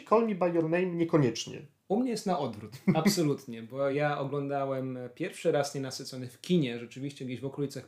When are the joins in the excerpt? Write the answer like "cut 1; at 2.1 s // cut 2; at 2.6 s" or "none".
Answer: none